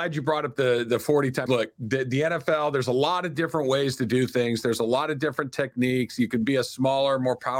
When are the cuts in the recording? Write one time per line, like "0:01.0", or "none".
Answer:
0:01.5